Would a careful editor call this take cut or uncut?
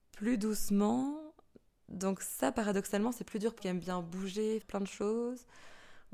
cut